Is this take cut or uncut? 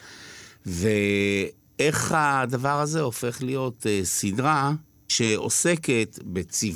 uncut